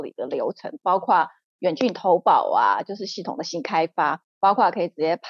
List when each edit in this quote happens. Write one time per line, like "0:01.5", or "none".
0:04.3